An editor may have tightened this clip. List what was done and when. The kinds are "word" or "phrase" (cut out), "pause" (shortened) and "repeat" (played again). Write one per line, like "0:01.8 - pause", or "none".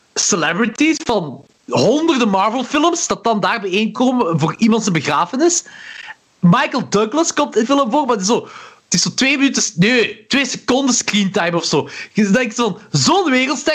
0:07.6 - word